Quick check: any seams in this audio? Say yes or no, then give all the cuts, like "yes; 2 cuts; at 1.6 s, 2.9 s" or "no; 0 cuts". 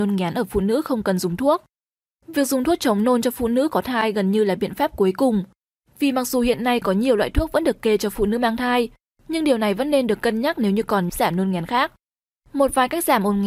yes; 1 cut; at 11.1 s